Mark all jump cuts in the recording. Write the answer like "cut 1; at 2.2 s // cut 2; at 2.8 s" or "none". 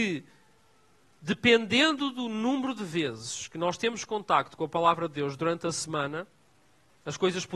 none